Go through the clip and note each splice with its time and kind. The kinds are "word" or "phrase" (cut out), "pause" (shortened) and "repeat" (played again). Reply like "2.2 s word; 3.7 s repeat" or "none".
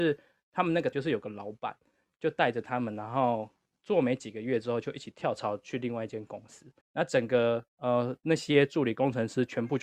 0.9 s word; 6.8 s pause; 7.7 s pause

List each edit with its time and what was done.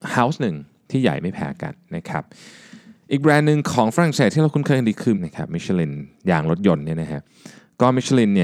5.1 s word

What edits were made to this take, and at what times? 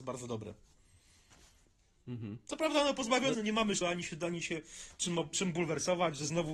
3.3 s word; 3.8 s word; 5.3 s word

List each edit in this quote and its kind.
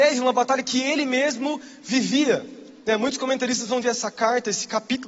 3.8 s phrase

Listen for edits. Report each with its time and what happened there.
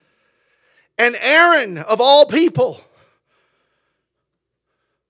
none

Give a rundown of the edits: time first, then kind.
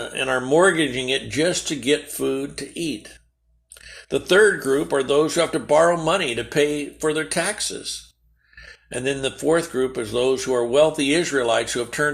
none

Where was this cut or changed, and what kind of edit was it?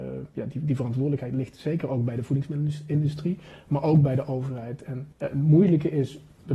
5.1 s pause

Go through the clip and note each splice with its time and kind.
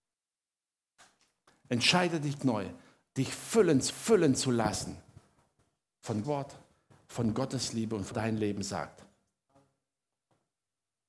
2.4 s word; 3.9 s repeat; 6.2 s word; 8.1 s phrase

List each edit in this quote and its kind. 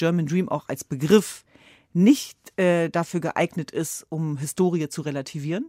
2.5 s pause

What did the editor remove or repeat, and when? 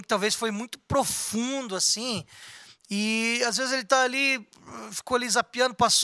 none

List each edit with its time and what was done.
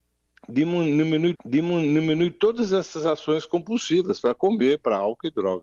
1.4 s repeat

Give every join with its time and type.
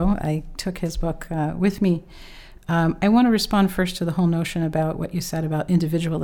none

